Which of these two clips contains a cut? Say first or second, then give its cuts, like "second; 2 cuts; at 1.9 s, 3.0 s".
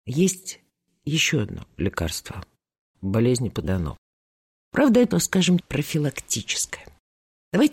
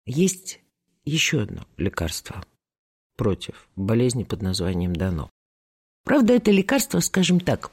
first; 4 cuts; at 2.9 s, 3.6 s, 5.1 s, 5.6 s